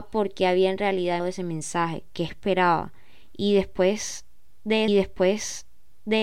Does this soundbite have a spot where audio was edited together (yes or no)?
yes